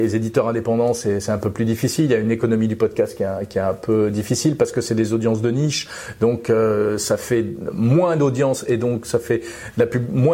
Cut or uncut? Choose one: uncut